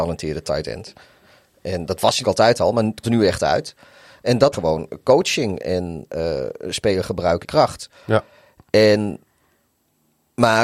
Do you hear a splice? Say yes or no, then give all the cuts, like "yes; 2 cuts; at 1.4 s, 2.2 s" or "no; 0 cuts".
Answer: yes; 5 cuts; at 2.2 s, 3.0 s, 4.5 s, 5.6 s, 7.4 s